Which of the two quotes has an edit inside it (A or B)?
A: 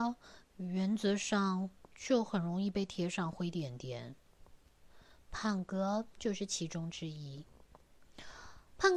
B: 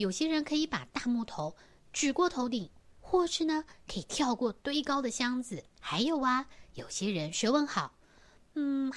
B